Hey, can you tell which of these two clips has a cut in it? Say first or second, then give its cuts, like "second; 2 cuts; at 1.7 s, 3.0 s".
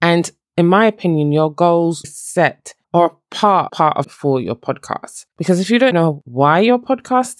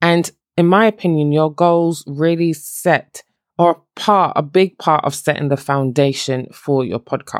first; 6 cuts; at 2.0 s, 2.8 s, 3.7 s, 4.0 s, 5.3 s, 5.9 s